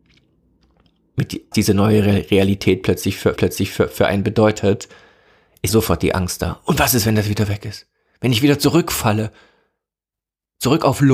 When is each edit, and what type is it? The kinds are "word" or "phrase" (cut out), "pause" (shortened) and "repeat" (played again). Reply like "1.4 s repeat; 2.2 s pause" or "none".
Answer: 1.5 s word; 3.4 s repeat; 5.7 s word